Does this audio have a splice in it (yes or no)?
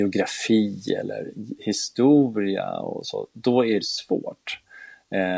yes